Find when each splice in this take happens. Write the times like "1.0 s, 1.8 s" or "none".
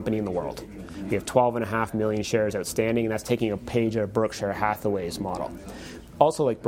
none